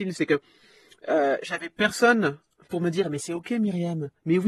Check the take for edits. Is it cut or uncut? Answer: uncut